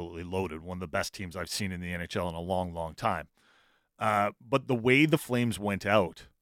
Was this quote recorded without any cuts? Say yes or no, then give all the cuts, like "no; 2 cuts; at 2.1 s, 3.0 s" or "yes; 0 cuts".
yes; 0 cuts